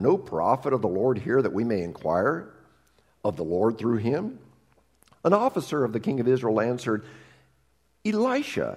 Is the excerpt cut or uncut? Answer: uncut